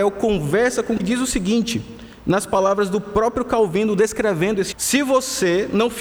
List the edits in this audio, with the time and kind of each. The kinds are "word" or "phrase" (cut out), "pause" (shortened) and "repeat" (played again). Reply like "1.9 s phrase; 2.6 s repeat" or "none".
1.0 s word; 4.7 s word